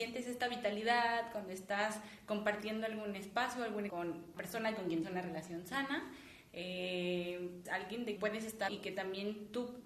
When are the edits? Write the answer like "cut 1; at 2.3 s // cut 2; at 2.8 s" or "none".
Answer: cut 1; at 3.9 s // cut 2; at 4.4 s // cut 3; at 5.0 s // cut 4; at 7.6 s // cut 5; at 8.2 s // cut 6; at 8.7 s